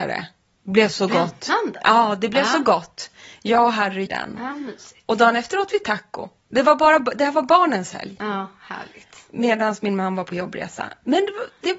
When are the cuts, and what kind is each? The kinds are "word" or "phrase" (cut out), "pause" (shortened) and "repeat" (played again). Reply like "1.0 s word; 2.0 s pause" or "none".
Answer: 4.1 s word